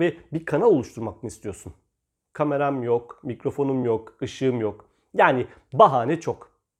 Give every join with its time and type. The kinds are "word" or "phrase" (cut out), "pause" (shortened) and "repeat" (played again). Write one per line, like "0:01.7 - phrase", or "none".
none